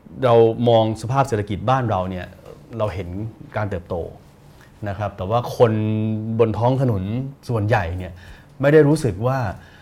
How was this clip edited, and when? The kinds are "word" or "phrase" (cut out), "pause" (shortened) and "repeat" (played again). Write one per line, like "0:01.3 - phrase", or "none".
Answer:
0:07.4 - pause